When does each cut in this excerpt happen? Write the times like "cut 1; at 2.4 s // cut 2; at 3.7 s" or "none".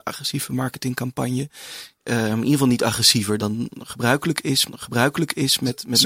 cut 1; at 3.4 s // cut 2; at 4.7 s